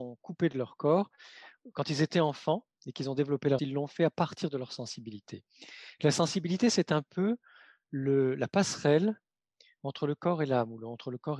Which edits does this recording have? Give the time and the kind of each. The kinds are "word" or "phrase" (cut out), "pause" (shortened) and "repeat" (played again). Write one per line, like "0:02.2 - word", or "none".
0:03.6 - word